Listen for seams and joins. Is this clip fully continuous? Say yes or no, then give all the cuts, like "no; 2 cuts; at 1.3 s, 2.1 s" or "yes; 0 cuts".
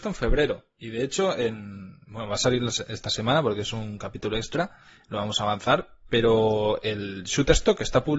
yes; 0 cuts